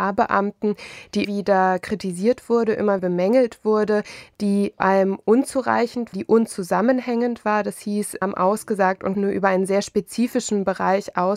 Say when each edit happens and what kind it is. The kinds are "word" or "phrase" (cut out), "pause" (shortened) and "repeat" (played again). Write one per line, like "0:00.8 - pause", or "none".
0:01.2 - word
0:03.0 - word
0:04.8 - word
0:06.1 - word
0:08.2 - word
0:09.1 - word